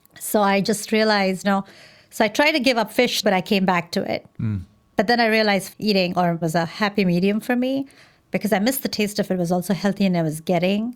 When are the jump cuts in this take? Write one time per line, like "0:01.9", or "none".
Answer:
0:01.4
0:03.2
0:05.7
0:06.4
0:09.3